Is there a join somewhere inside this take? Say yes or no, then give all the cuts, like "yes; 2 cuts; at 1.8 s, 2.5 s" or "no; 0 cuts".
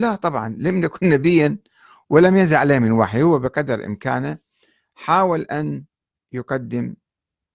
no; 0 cuts